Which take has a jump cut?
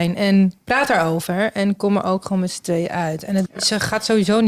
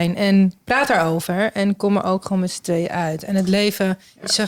first; 1 cut; at 3.5 s

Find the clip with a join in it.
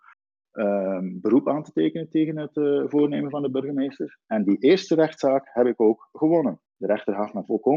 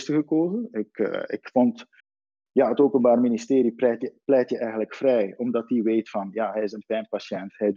first; 1 cut; at 6.7 s

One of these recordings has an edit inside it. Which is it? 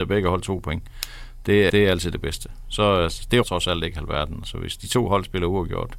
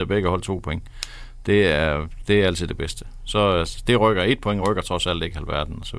first; 2 cuts; at 1.7 s, 3.4 s

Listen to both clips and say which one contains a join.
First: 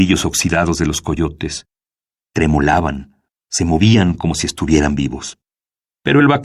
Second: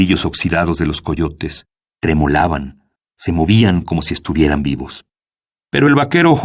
second; 1 cut; at 1.9 s

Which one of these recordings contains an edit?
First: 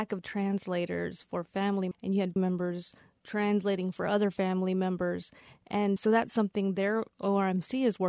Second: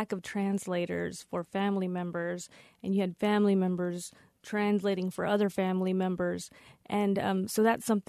first; 3 cuts; at 1.9 s, 2.4 s, 6.0 s

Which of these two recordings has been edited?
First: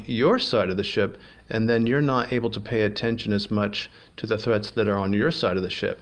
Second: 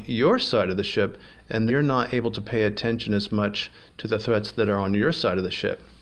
second; 1 cut; at 1.7 s

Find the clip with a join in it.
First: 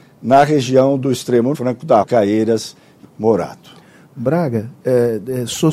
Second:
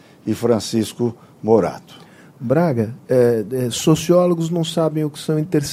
first; 3 cuts; at 1.5 s, 2.0 s, 3.0 s

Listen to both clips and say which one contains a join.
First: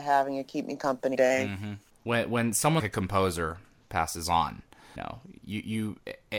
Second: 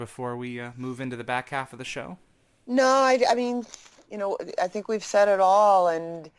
first; 3 cuts; at 1.1 s, 2.8 s, 5.0 s

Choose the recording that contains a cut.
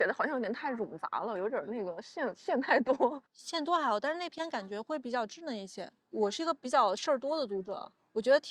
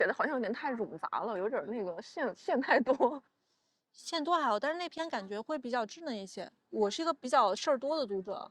first; 1 cut; at 3.3 s

